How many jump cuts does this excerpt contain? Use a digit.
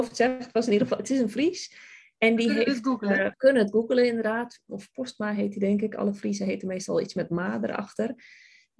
1